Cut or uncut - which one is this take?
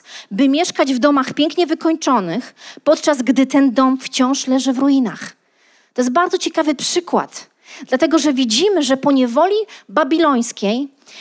uncut